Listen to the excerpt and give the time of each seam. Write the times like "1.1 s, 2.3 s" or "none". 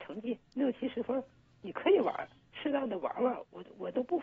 none